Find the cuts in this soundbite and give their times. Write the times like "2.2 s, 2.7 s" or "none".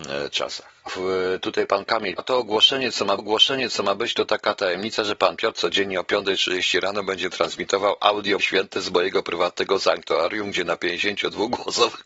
2.2 s, 3.2 s, 8.4 s